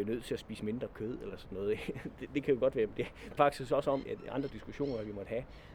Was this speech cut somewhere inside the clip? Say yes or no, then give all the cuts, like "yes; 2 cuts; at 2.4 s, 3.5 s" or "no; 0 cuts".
yes; 3 cuts; at 3.4 s, 4.0 s, 4.5 s